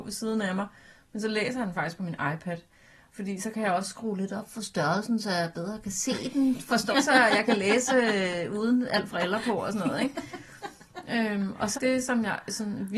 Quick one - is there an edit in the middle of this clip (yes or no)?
yes